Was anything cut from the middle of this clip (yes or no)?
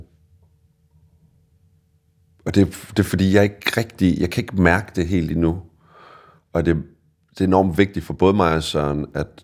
no